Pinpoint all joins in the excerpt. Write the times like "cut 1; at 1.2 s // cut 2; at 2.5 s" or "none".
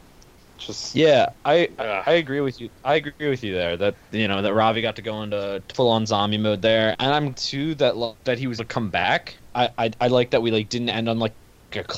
cut 1; at 1.3 s // cut 2; at 3.9 s // cut 3; at 5.7 s // cut 4; at 6.9 s // cut 5; at 7.3 s // cut 6; at 8.2 s // cut 7; at 8.6 s // cut 8; at 9.4 s